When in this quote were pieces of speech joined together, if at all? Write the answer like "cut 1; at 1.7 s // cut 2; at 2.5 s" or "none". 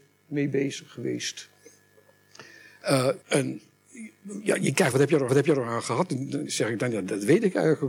cut 1; at 3.2 s // cut 2; at 4.9 s // cut 3; at 5.3 s // cut 4; at 6.5 s